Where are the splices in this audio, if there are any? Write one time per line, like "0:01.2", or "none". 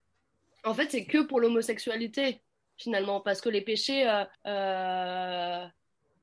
0:02.5
0:04.3